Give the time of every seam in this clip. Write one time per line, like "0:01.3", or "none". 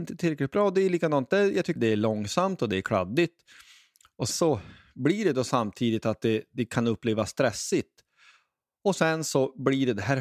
0:01.8
0:04.3